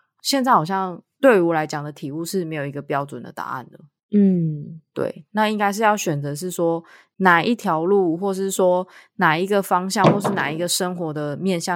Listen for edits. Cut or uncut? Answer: uncut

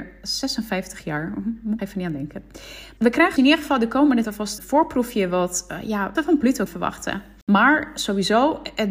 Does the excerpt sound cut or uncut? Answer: cut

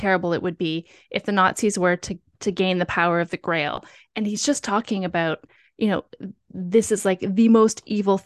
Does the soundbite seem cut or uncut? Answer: uncut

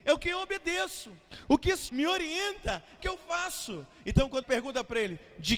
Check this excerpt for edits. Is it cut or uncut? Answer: cut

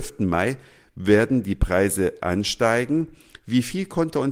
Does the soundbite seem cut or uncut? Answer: uncut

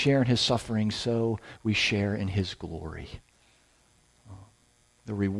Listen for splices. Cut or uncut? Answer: uncut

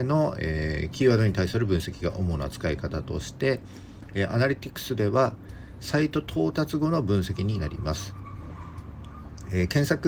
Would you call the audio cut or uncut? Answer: uncut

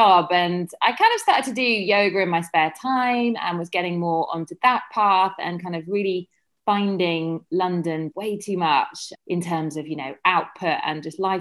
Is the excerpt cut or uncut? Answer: cut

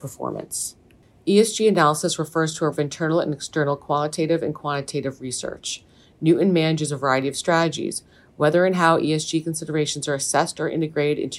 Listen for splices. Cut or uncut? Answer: cut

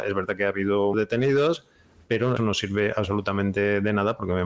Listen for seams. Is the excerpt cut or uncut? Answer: cut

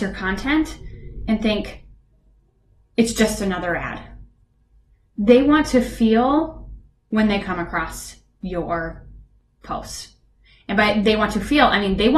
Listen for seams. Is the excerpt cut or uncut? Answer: uncut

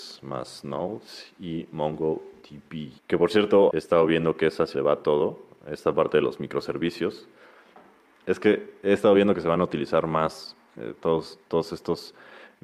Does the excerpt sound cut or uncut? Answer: cut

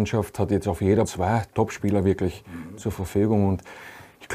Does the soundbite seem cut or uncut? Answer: cut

